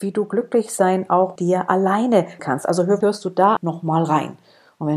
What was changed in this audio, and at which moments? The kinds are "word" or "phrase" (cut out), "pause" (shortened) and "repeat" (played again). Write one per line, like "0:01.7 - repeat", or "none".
0:01.4 - word
0:02.4 - word
0:03.0 - word
0:03.6 - word